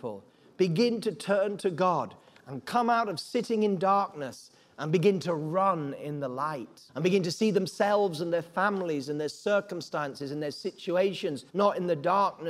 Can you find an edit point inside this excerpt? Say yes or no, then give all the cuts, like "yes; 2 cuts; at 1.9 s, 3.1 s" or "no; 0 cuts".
yes; 2 cuts; at 6.9 s, 11.5 s